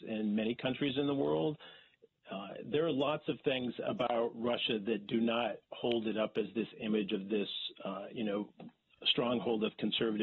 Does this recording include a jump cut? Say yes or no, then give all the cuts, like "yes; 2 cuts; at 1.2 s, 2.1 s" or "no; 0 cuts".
yes; 1 cut; at 5.6 s